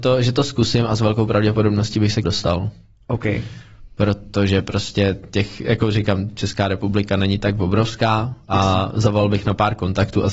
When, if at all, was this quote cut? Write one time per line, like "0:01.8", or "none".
0:02.2